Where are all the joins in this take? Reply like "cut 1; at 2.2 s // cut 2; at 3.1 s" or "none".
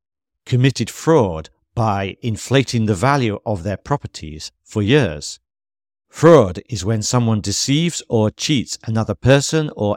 none